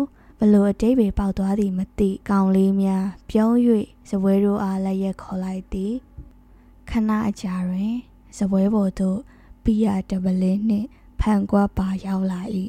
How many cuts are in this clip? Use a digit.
1